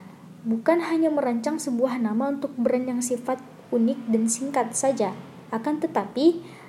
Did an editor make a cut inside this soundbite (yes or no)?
no